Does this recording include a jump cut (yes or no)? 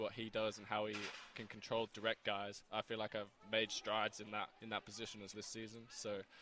yes